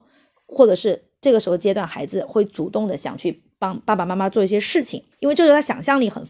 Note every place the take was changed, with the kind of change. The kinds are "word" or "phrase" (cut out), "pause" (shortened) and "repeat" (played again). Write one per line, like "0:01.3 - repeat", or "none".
0:05.1 - pause